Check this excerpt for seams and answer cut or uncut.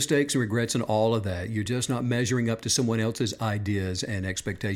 uncut